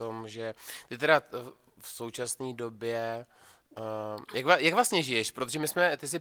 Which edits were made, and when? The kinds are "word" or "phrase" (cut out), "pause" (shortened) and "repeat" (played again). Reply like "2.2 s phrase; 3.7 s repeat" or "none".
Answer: none